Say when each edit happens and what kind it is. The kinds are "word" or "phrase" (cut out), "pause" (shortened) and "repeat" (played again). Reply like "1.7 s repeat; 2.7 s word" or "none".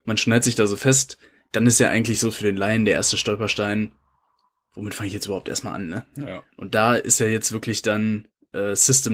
none